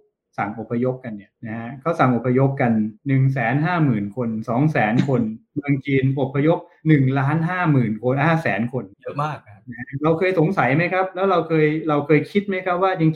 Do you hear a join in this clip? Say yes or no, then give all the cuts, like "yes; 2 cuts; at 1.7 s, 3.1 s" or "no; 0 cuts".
yes; 3 cuts; at 1.4 s, 3.0 s, 8.9 s